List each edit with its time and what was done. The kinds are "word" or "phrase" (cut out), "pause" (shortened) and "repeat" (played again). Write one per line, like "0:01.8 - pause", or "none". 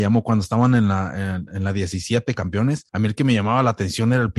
0:02.4 - phrase
0:02.9 - pause